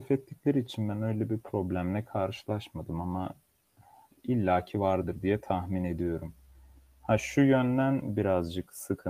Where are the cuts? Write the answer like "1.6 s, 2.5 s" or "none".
none